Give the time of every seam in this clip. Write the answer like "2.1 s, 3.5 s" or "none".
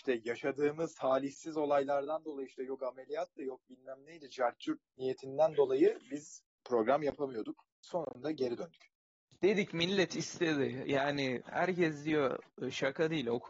7.7 s, 9.2 s